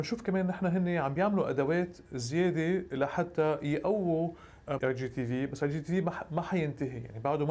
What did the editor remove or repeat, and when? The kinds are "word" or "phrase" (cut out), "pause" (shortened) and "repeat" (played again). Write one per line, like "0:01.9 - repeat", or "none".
0:04.8 - word